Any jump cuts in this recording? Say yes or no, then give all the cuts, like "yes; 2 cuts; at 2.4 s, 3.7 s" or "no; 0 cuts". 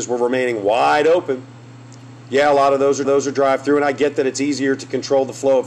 yes; 1 cut; at 3.0 s